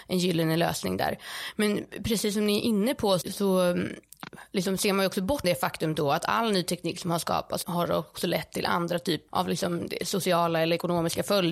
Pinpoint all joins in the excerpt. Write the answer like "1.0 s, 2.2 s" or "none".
3.2 s, 5.4 s, 7.6 s, 9.3 s